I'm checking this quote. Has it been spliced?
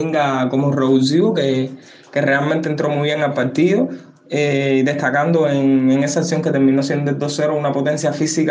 no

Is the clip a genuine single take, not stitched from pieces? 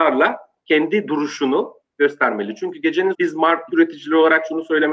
no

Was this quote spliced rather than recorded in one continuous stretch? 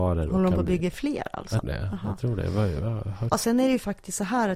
yes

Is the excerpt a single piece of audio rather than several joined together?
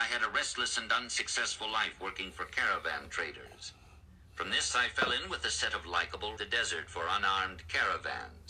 no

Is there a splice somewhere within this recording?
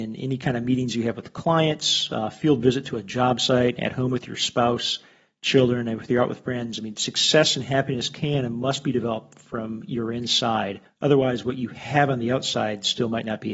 no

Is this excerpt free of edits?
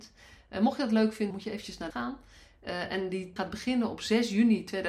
no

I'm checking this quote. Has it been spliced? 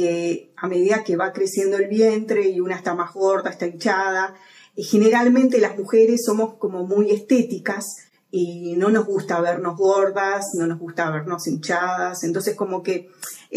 no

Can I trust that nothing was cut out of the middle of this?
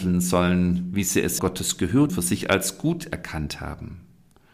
no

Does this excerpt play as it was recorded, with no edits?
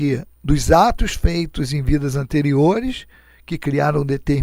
yes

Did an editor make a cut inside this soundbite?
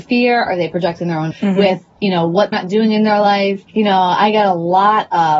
yes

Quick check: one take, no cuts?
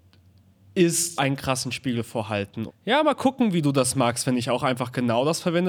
no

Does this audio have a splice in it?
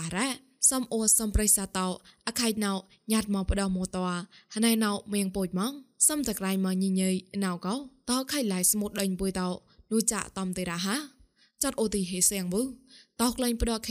no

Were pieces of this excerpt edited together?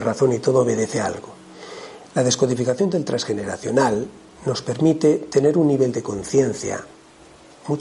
no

